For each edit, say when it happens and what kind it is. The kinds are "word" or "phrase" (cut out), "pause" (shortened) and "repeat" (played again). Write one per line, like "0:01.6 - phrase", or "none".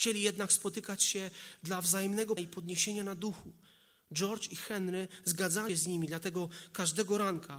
0:02.4 - word
0:05.7 - word